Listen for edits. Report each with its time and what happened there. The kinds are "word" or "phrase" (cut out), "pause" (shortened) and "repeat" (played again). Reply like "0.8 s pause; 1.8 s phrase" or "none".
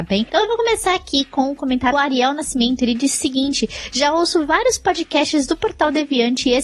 1.9 s word